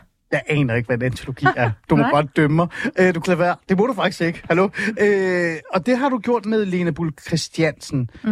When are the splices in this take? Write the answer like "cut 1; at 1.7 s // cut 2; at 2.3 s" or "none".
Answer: cut 1; at 3.2 s // cut 2; at 6.4 s